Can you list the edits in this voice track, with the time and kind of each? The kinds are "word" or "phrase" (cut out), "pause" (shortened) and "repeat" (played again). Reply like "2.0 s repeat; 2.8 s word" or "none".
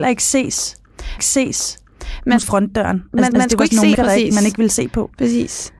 1.2 s repeat; 2.4 s phrase; 3.3 s repeat; 3.9 s word